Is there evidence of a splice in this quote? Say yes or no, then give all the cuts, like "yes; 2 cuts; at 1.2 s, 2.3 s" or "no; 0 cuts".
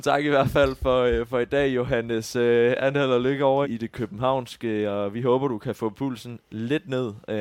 yes; 1 cut; at 3.6 s